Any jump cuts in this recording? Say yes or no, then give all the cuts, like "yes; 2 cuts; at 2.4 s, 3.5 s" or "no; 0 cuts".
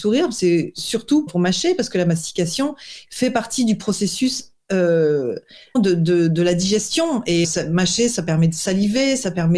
yes; 3 cuts; at 1.3 s, 5.7 s, 7.4 s